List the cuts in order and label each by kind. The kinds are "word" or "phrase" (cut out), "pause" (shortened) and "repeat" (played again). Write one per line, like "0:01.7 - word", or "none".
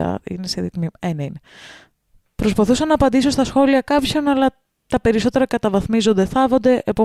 none